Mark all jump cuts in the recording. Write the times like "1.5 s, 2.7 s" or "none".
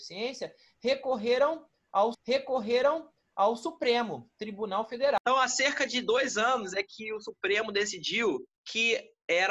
2.1 s, 8.6 s